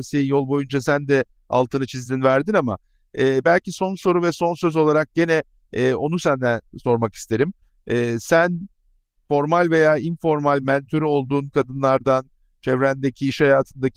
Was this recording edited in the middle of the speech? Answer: no; 0 cuts

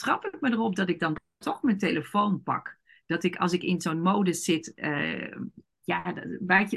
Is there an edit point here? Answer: no; 0 cuts

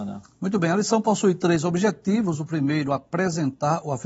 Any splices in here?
no; 0 cuts

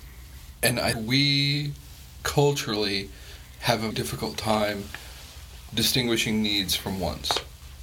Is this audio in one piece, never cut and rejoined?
no; 2 cuts; at 0.9 s, 3.9 s

